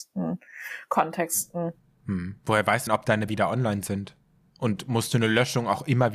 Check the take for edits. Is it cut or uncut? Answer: cut